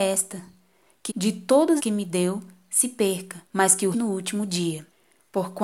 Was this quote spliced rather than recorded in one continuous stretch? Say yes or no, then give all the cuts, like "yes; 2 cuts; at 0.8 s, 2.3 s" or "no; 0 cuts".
yes; 4 cuts; at 1.1 s, 1.8 s, 3.5 s, 3.9 s